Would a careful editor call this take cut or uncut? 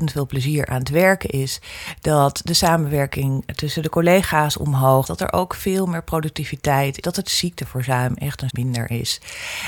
cut